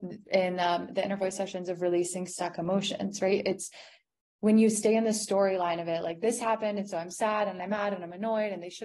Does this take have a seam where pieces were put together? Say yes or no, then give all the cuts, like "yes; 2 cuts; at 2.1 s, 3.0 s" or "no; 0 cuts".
no; 0 cuts